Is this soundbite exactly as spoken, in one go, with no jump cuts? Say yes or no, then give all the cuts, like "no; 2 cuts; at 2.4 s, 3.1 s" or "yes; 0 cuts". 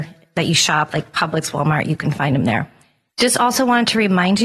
yes; 0 cuts